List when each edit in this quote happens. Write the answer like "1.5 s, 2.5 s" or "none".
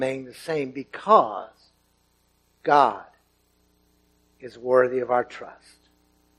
none